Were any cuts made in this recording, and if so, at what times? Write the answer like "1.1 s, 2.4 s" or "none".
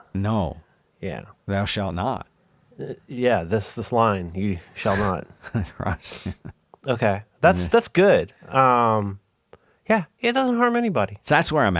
none